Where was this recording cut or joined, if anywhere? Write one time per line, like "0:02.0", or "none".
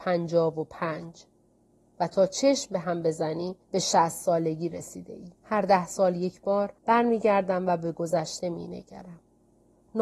0:03.6
0:05.3
0:06.8